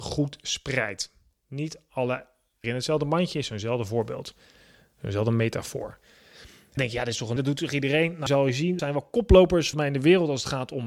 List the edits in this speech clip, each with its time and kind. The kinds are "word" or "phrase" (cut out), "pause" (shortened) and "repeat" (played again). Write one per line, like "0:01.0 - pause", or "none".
0:02.6 - word
0:06.8 - word
0:07.4 - word
0:08.3 - word
0:08.8 - word
0:09.7 - word

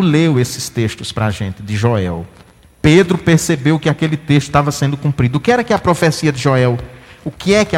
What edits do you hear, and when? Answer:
none

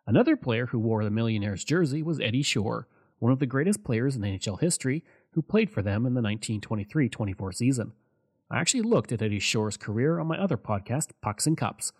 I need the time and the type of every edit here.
none

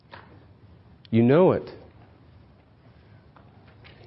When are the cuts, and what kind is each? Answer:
none

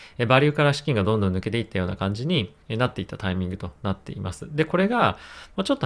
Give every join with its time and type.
0:02.6 - pause

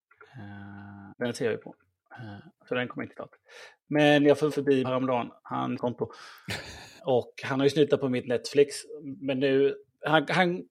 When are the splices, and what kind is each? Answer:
0:01.1 - pause
0:03.1 - word
0:04.5 - word
0:04.8 - phrase
0:05.8 - phrase
0:07.0 - word

